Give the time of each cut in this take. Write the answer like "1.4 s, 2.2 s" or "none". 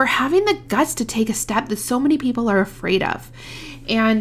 none